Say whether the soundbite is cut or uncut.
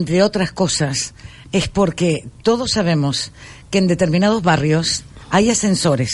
uncut